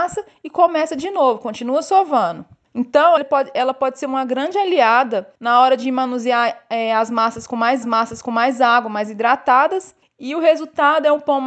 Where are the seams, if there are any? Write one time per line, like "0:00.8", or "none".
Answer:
0:03.2
0:05.3
0:07.8